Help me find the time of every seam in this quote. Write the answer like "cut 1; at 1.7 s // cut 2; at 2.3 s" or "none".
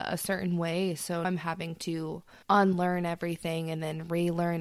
cut 1; at 1.2 s // cut 2; at 2.4 s